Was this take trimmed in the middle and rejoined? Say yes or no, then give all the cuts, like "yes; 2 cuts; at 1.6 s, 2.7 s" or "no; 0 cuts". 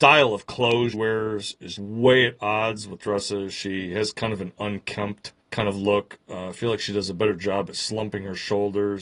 yes; 4 cuts; at 0.9 s, 1.8 s, 3.0 s, 5.4 s